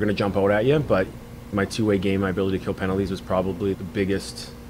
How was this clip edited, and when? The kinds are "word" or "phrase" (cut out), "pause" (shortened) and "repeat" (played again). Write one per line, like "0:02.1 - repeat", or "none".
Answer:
0:01.5 - phrase
0:03.7 - word